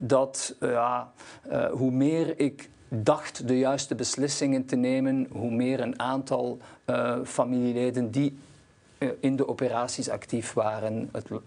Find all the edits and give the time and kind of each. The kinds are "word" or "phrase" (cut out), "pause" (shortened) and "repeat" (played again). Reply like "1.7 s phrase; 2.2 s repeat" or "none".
none